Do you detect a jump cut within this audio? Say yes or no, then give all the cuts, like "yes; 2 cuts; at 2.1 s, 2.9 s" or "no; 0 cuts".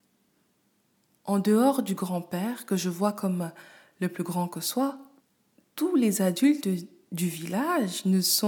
no; 0 cuts